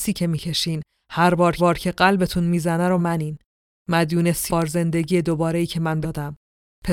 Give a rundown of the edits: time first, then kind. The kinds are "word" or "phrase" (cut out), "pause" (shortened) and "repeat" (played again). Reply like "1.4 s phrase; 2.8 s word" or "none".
1.6 s repeat; 3.0 s word; 4.5 s phrase; 6.0 s word